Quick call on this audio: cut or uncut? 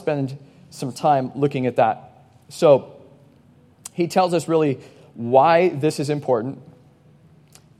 uncut